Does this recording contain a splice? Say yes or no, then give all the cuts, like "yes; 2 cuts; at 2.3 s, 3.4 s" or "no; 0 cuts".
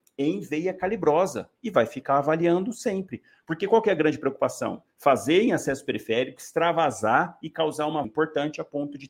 yes; 1 cut; at 8.0 s